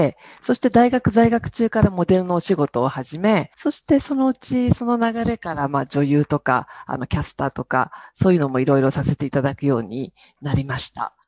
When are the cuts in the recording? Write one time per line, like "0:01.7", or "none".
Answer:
0:03.5